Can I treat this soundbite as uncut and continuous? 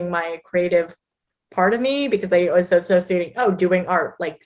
yes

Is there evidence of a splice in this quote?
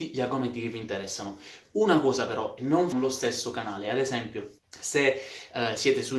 yes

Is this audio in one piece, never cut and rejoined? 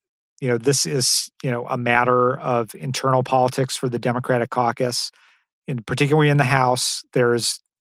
yes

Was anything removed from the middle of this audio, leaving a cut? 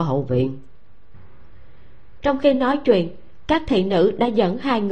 no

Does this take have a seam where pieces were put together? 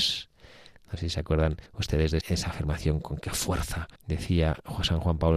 yes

